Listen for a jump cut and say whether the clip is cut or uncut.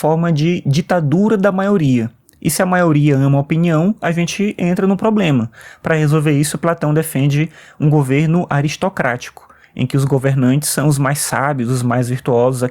uncut